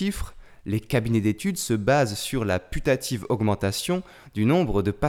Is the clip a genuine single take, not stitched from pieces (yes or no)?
yes